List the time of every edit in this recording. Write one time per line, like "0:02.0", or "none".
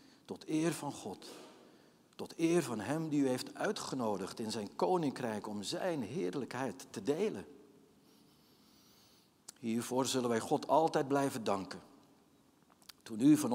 none